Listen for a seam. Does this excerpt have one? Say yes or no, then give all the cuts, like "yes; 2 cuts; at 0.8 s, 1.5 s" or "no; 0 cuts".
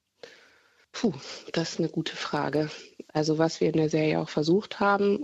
yes; 1 cut; at 3.1 s